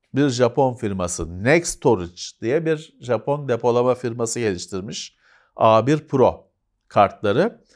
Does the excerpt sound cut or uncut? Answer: uncut